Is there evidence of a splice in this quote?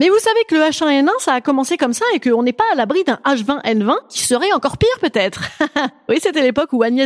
no; 0 cuts

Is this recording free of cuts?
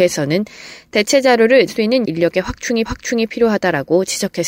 no; 3 cuts; at 1.7 s, 2.0 s, 2.9 s

